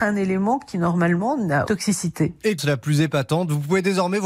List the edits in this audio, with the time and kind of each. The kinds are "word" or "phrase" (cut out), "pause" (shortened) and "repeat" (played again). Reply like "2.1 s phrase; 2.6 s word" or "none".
1.7 s word; 2.6 s word